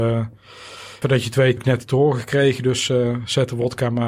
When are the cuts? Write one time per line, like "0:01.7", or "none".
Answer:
0:01.0
0:01.6